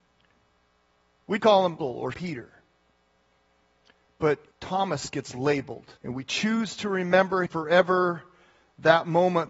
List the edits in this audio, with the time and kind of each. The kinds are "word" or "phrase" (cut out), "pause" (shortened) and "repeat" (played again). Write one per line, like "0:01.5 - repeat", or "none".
0:01.4 - word
0:01.8 - word
0:02.1 - word
0:04.5 - pause
0:06.0 - pause
0:07.5 - word